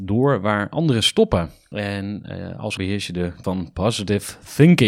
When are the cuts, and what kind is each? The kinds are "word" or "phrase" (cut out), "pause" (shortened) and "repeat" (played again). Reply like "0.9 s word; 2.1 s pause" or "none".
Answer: 2.8 s phrase; 3.4 s word